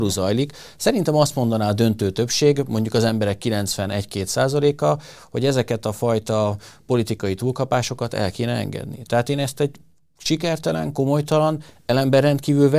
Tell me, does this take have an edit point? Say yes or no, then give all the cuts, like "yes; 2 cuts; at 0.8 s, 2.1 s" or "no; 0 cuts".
no; 0 cuts